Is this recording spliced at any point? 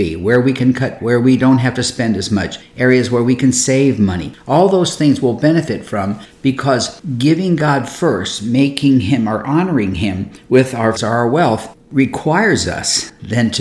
yes; 3 cuts; at 1.0 s, 11.0 s, 11.8 s

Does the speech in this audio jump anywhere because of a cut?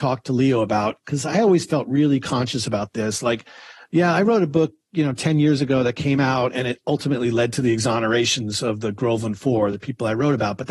no; 0 cuts

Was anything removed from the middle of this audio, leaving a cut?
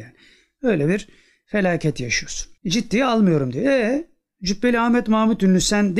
yes; 1 cut; at 2.6 s

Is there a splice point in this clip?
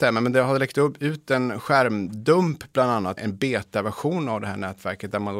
yes; 1 cut; at 3.2 s

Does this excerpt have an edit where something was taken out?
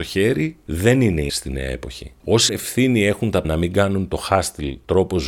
yes; 3 cuts; at 1.3 s, 2.5 s, 3.4 s

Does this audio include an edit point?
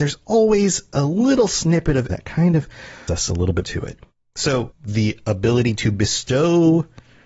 yes; 4 cuts; at 2.1 s, 3.1 s, 3.6 s, 4.7 s

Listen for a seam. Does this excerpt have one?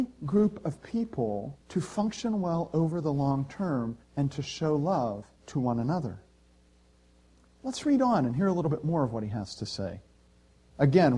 yes; 3 cuts; at 1.6 s, 4.0 s, 5.4 s

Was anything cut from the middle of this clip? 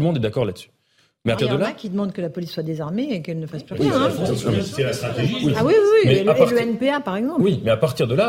yes; 1 cut; at 1.4 s

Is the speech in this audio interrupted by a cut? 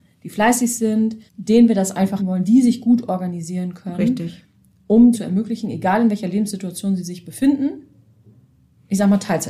yes; 3 cuts; at 1.3 s, 2.2 s, 5.1 s

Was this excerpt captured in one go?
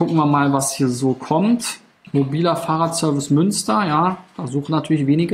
yes; 0 cuts

